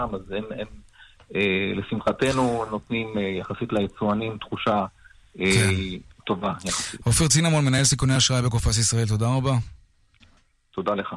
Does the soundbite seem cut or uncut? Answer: uncut